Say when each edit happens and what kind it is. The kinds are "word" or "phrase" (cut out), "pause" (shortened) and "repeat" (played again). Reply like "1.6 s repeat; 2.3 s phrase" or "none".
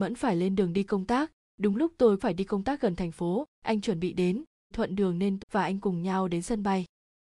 2.2 s word; 4.7 s word; 5.4 s word